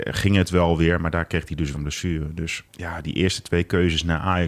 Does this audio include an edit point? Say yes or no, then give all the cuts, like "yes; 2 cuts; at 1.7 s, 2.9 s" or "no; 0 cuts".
yes; 2 cuts; at 1.7 s, 2.7 s